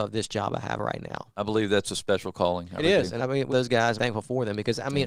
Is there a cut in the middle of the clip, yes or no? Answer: yes